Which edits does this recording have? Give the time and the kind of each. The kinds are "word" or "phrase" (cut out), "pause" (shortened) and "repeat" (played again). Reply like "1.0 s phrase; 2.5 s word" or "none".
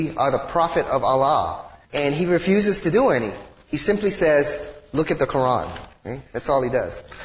1.8 s pause